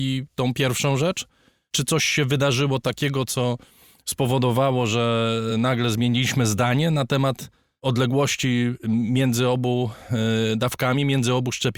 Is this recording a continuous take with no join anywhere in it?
yes; 0 cuts

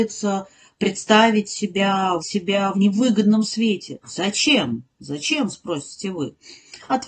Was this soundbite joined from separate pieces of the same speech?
yes; 2 cuts; at 2.2 s, 2.7 s

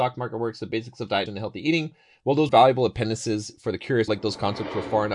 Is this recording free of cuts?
no; 3 cuts; at 1.3 s, 2.5 s, 4.1 s

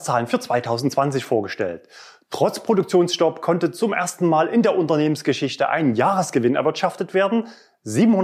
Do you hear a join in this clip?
no; 0 cuts

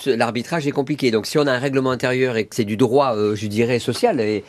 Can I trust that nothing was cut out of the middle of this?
no; 1 cut; at 2.5 s

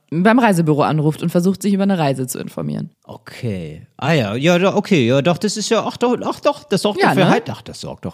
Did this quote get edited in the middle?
no; 0 cuts

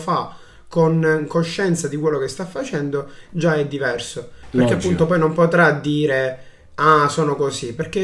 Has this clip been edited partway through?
no; 0 cuts

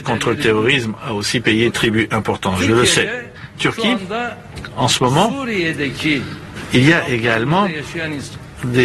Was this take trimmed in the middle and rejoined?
yes; 2 cuts; at 1.7 s, 3.6 s

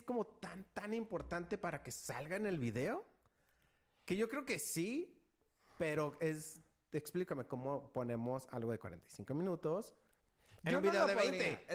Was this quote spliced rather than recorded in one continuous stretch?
no; 0 cuts

